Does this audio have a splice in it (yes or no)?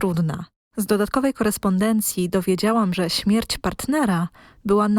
yes